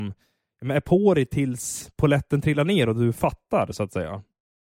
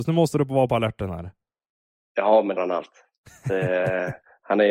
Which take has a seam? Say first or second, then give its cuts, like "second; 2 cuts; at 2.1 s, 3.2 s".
second; 1 cut; at 2.6 s